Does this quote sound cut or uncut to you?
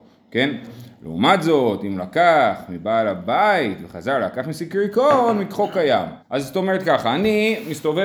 cut